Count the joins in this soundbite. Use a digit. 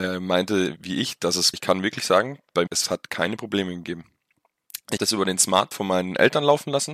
4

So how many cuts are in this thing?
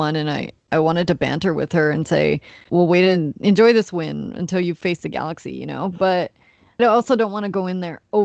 2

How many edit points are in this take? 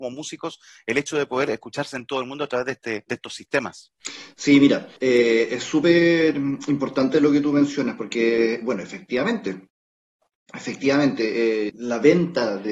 3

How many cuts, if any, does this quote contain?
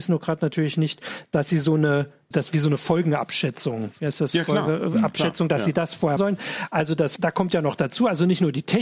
3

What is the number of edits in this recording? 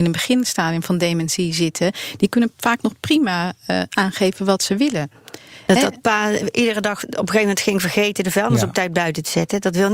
0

